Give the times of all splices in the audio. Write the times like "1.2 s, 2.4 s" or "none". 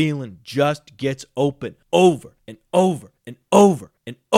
none

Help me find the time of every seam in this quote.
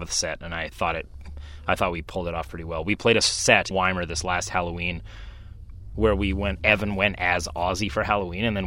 3.7 s, 5.9 s

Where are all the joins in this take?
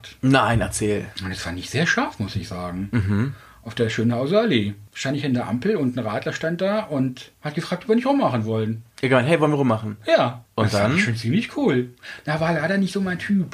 none

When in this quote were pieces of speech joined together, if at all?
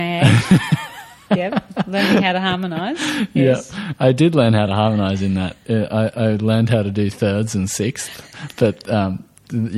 none

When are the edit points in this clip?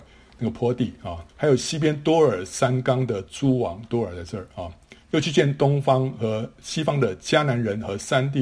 1.3 s, 5.0 s

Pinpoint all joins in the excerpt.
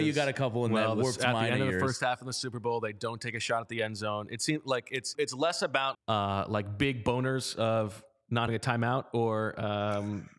5.1 s, 5.9 s, 8.5 s

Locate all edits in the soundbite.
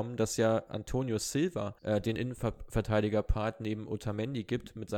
1.8 s

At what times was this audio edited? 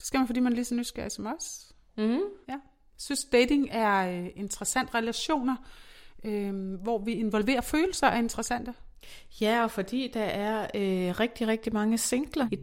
2.4 s

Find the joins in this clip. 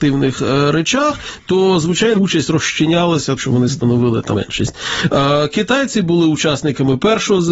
2.2 s, 3.4 s, 4.3 s

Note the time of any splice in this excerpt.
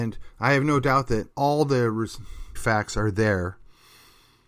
1.3 s, 2.6 s

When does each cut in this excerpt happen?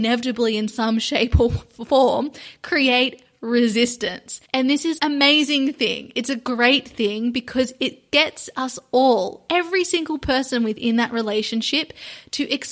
4.4 s, 5.0 s

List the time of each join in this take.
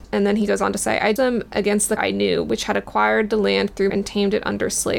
1.2 s, 2.0 s, 3.9 s

